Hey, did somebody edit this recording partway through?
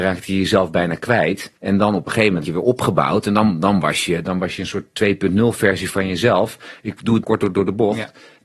yes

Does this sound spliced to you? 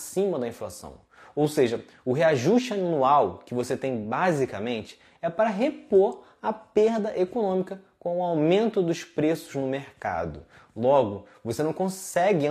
no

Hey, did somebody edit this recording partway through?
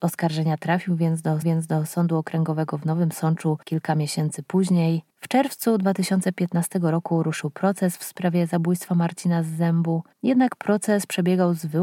yes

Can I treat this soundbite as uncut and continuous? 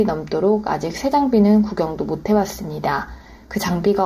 yes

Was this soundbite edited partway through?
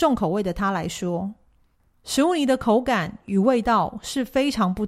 no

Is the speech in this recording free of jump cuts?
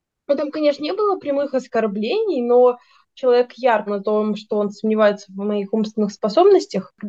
no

